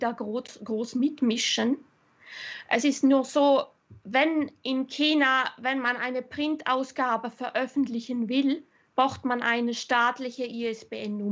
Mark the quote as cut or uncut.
uncut